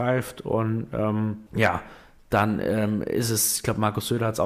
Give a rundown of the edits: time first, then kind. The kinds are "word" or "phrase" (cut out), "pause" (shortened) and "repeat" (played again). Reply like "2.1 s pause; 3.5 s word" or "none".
1.5 s pause